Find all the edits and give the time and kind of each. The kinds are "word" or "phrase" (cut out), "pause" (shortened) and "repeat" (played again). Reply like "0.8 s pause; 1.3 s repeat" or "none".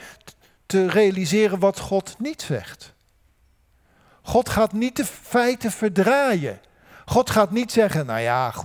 none